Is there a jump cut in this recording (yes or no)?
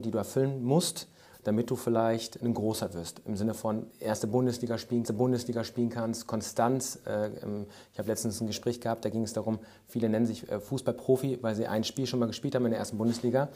yes